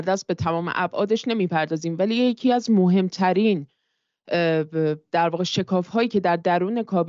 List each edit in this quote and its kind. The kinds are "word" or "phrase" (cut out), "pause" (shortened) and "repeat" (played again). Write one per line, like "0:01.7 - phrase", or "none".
none

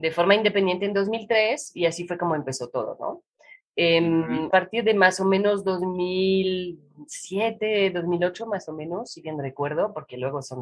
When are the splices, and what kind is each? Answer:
0:04.5 - word

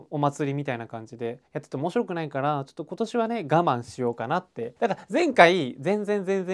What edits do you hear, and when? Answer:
0:01.5 - pause
0:04.8 - pause

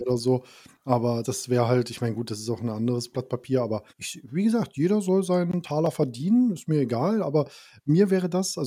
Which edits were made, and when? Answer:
0:01.2 - word
0:03.9 - pause

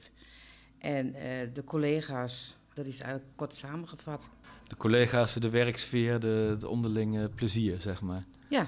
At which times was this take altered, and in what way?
none

